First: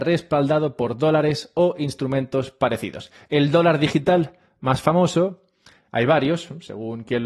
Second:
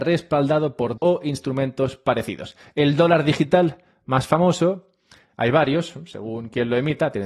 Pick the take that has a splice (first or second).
second